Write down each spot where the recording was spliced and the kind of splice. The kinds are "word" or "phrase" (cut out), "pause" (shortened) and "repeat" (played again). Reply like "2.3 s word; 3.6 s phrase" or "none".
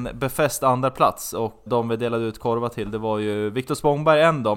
1.7 s word